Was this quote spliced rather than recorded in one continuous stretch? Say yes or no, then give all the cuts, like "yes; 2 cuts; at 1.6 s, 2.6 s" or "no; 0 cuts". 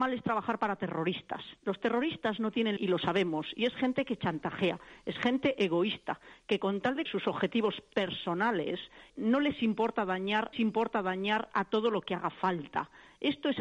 yes; 4 cuts; at 2.8 s, 7.1 s, 9.1 s, 10.5 s